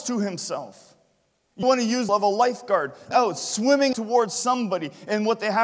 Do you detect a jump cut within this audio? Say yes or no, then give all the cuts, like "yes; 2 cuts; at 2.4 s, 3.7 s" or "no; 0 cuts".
yes; 4 cuts; at 1.6 s, 2.1 s, 3.1 s, 3.9 s